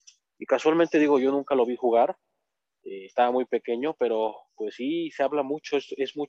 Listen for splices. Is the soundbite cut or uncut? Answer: uncut